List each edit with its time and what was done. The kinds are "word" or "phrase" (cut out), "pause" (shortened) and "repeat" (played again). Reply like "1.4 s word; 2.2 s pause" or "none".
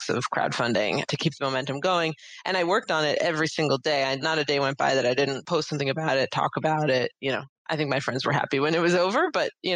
none